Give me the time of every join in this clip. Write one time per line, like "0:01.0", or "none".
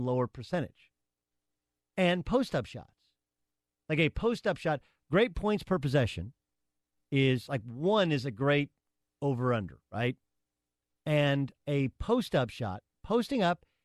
none